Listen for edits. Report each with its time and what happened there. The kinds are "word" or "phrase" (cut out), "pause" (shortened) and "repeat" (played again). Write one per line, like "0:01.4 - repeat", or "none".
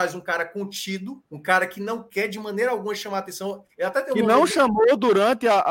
0:01.3 - pause